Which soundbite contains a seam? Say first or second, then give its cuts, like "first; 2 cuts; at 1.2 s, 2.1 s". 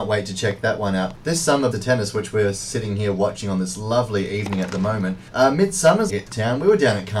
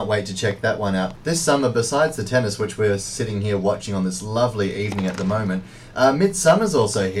first; 3 cuts; at 1.7 s, 5.3 s, 6.1 s